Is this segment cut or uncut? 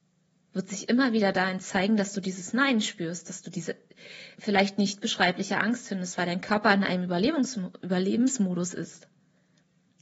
cut